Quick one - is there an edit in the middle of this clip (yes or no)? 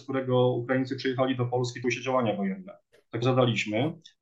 yes